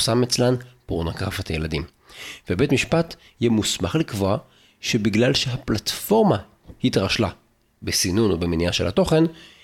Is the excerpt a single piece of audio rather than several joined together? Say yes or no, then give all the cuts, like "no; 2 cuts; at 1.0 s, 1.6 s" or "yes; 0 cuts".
yes; 0 cuts